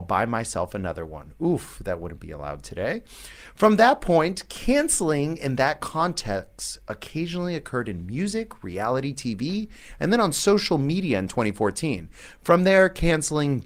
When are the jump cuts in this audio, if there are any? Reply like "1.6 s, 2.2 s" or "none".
none